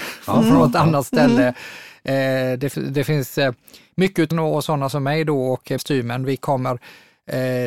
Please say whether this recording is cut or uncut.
cut